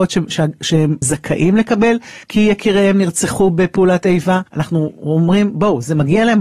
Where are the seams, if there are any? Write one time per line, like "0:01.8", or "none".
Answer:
0:01.0
0:02.2
0:04.5